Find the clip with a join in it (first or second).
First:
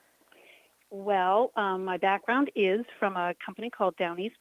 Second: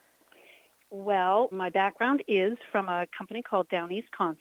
second